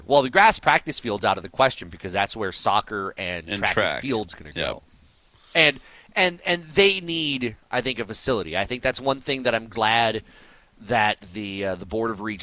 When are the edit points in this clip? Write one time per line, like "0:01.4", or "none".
none